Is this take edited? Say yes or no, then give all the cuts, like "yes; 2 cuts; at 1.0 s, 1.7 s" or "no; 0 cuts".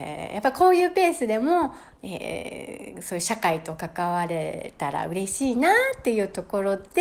no; 0 cuts